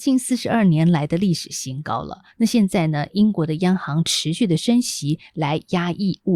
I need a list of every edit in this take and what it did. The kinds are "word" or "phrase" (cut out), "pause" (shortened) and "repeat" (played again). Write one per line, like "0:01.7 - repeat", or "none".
0:02.3 - pause